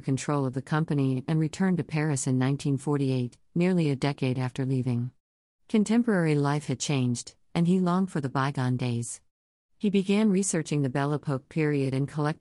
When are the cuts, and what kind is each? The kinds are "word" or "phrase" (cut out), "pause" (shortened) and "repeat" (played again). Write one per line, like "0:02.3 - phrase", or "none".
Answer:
none